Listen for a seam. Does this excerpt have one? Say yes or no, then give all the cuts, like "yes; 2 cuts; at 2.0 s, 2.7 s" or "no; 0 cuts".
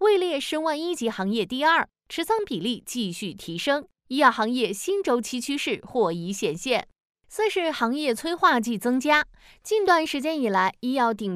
no; 0 cuts